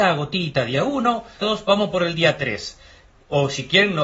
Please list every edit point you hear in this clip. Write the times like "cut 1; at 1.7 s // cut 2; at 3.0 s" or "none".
cut 1; at 1.4 s